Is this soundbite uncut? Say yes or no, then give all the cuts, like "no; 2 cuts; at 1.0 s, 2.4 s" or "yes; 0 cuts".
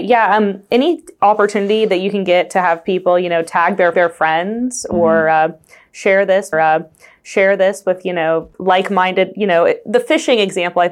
no; 3 cuts; at 3.9 s, 6.5 s, 8.5 s